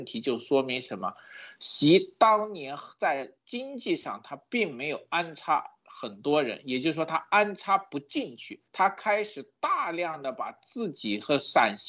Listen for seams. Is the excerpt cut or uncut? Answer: cut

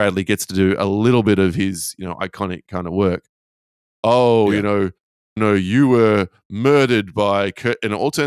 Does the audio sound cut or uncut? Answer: cut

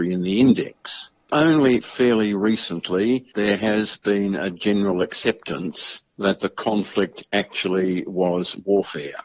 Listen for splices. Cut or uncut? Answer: cut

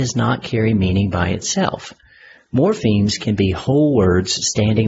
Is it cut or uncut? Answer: uncut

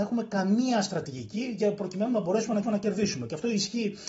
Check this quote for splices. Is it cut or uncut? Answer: cut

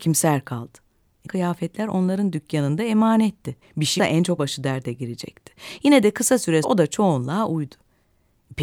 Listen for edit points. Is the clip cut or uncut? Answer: cut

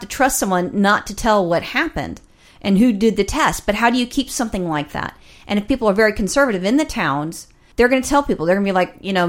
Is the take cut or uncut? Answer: uncut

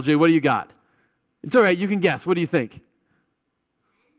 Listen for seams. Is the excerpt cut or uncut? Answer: uncut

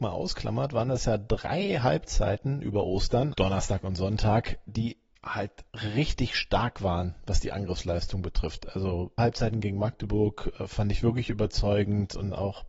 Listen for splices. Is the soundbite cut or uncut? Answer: cut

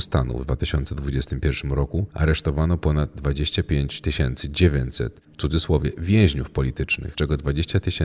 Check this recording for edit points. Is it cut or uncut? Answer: cut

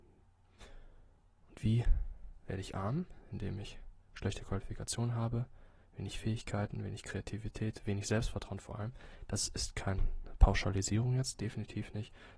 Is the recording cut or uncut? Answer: uncut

